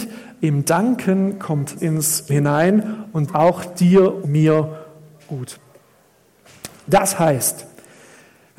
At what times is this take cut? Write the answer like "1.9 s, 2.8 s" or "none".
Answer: 1.8 s, 2.3 s, 3.3 s, 4.2 s